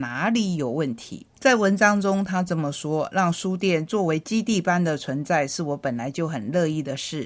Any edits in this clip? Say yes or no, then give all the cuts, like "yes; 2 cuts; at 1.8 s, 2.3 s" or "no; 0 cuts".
yes; 1 cut; at 1.3 s